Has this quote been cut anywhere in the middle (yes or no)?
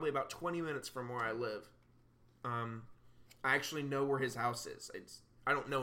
no